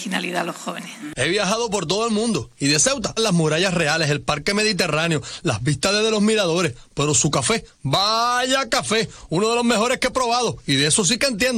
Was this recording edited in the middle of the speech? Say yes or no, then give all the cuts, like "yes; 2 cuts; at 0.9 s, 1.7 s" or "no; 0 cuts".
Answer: yes; 1 cut; at 3.2 s